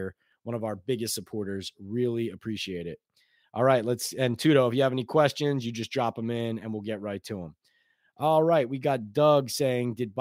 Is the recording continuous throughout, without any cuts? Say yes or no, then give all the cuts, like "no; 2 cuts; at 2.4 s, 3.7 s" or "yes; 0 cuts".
yes; 0 cuts